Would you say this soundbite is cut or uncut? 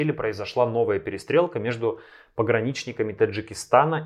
uncut